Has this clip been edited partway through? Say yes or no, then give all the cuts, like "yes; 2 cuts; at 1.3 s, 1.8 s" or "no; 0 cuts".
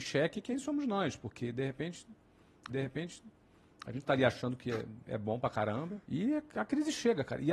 yes; 2 cuts; at 2.7 s, 6.0 s